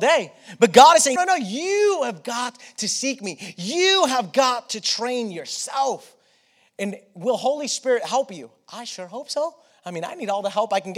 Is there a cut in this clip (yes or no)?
yes